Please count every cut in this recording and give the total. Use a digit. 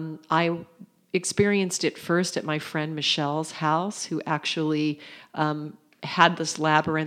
0